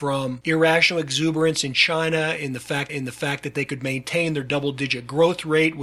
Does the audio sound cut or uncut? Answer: cut